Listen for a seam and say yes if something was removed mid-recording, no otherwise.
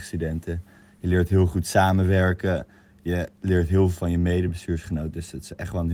no